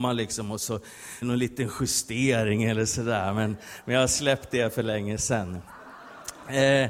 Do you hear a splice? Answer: yes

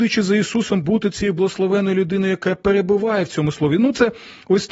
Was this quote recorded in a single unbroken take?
yes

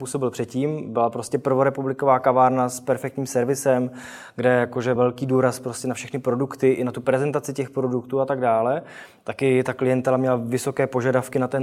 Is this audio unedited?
no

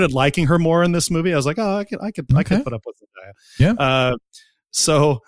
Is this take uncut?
yes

